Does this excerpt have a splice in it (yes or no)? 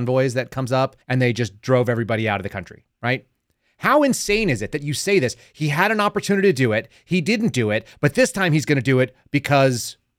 yes